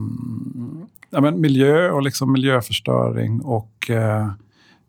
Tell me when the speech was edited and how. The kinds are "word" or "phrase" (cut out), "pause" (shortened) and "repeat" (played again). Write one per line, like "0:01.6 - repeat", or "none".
none